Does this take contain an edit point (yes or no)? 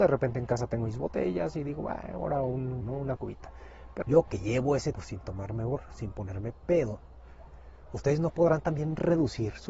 yes